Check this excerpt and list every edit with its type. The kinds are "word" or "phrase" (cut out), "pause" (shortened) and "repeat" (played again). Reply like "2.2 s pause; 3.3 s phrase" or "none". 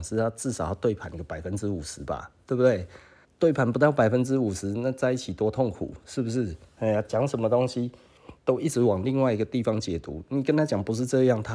3.2 s pause; 8.4 s pause